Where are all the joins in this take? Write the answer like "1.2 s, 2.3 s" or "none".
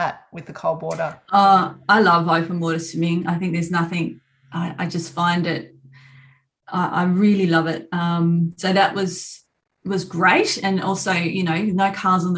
none